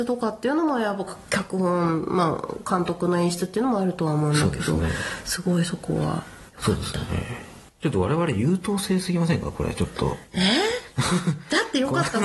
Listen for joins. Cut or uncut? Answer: cut